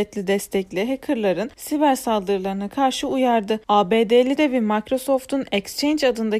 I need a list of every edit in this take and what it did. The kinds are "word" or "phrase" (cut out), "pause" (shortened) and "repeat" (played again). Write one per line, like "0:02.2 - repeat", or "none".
0:04.4 - word